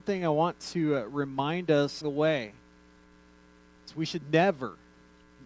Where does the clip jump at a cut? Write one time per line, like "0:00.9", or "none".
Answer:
0:02.0